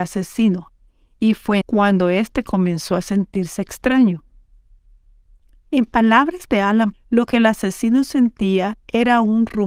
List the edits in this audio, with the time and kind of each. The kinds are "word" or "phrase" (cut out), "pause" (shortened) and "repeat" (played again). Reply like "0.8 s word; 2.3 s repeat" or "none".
1.6 s word; 6.9 s word